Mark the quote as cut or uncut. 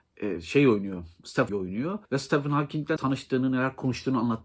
cut